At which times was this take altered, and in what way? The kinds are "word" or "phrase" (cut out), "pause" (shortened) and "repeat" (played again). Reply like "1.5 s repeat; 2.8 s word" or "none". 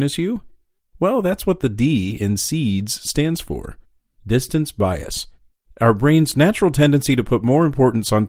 none